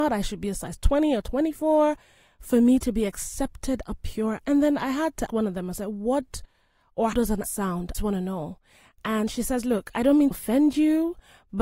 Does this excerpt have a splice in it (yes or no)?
yes